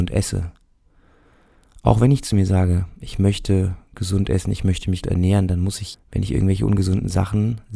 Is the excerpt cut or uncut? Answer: cut